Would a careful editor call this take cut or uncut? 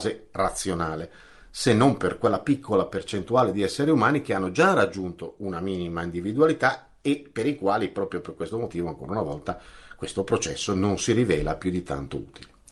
uncut